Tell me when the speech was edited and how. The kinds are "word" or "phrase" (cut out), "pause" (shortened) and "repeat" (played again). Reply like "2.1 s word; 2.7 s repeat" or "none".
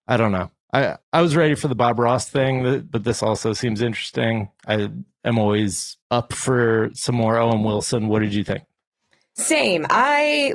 1.0 s pause; 6.0 s pause